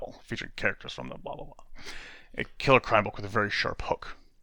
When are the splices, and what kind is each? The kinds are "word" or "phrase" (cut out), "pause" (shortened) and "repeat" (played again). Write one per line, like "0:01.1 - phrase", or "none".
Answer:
none

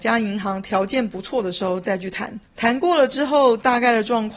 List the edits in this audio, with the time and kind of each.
0:02.4 - pause

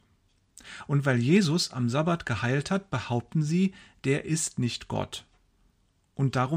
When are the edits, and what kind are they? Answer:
none

